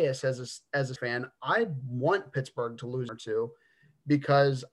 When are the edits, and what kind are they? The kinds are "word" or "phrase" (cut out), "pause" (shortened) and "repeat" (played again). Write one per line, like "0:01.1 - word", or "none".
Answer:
0:01.0 - word
0:03.1 - phrase